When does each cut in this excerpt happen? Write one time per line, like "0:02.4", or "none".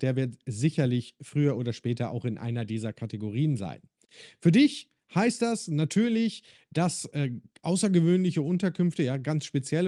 none